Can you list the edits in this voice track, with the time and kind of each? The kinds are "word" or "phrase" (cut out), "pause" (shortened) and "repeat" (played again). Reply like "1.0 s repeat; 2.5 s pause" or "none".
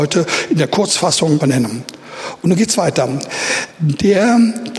1.4 s word; 3.7 s pause